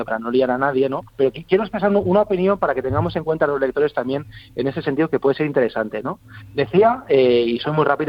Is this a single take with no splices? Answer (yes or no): no